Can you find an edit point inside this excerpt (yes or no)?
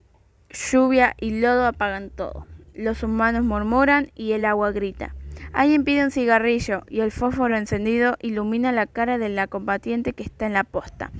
no